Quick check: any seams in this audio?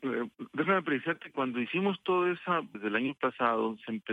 yes; 2 cuts; at 1.3 s, 2.7 s

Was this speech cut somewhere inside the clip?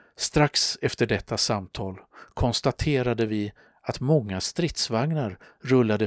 no; 0 cuts

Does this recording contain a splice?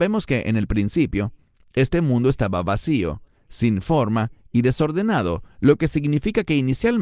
no; 0 cuts

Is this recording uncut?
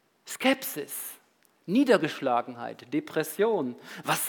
yes; 0 cuts

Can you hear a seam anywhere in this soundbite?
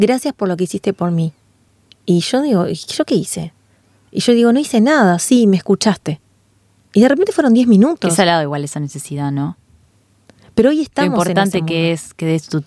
no; 0 cuts

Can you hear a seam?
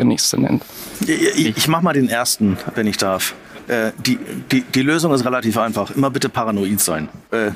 no; 0 cuts

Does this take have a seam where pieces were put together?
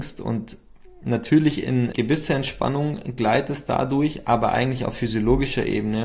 yes; 1 cut; at 1.9 s

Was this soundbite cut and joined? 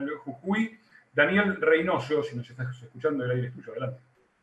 no; 0 cuts

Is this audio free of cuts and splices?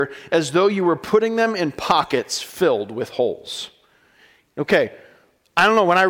yes; 0 cuts

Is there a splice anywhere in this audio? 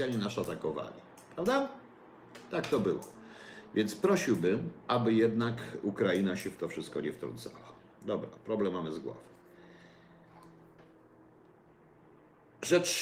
no; 0 cuts

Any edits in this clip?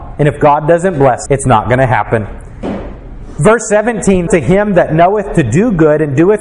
yes; 2 cuts; at 1.3 s, 4.3 s

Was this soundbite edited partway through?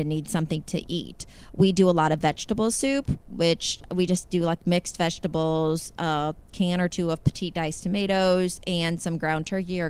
no; 0 cuts

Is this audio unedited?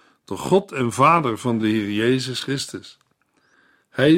yes; 0 cuts

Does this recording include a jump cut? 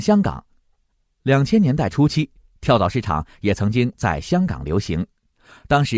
no; 0 cuts

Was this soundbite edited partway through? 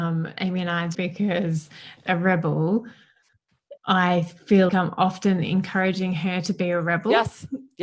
yes; 4 cuts; at 0.9 s, 2.1 s, 3.8 s, 4.7 s

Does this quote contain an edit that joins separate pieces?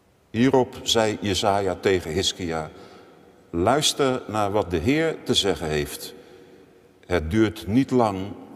no; 0 cuts

